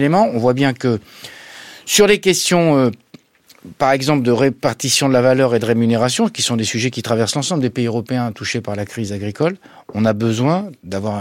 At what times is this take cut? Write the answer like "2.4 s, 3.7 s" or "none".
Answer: none